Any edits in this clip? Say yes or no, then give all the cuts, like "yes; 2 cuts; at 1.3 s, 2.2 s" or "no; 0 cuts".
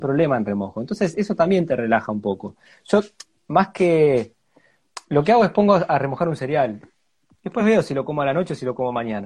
no; 0 cuts